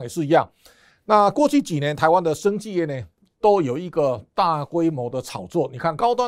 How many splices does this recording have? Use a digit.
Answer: 0